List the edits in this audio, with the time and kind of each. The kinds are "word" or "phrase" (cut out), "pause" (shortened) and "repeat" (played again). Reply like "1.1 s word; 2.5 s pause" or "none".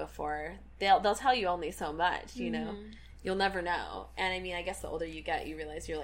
none